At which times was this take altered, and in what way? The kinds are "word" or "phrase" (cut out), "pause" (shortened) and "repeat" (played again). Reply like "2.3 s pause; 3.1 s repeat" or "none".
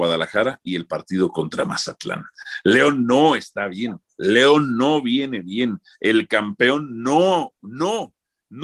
none